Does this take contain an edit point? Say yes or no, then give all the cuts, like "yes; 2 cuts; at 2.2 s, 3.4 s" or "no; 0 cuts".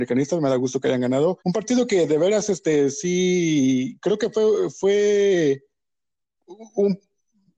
yes; 1 cut; at 1.4 s